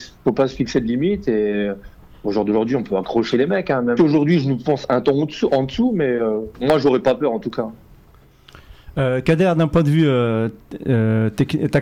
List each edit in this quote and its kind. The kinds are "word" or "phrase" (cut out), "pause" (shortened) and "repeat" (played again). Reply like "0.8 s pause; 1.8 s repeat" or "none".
4.0 s phrase